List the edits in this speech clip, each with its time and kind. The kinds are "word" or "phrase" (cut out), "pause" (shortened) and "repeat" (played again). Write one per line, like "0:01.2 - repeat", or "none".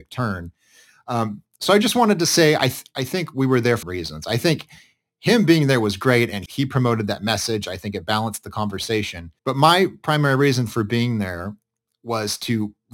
0:03.8 - word
0:06.5 - phrase
0:09.4 - pause